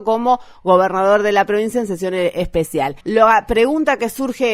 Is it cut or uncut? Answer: cut